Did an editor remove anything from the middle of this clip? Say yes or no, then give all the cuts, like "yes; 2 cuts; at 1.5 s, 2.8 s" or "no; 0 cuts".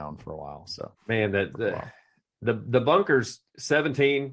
yes; 1 cut; at 1.0 s